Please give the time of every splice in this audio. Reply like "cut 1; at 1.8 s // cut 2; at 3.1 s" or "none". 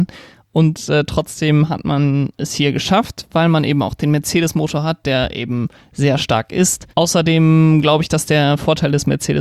cut 1; at 6.9 s